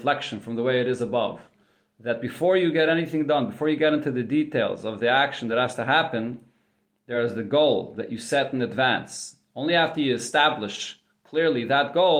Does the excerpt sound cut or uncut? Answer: uncut